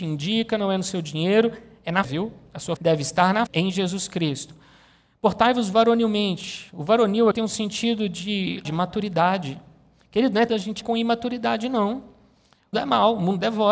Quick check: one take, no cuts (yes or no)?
no